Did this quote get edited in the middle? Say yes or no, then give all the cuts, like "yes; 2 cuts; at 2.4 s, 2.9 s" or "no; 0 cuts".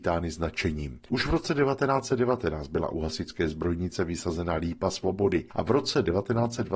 no; 0 cuts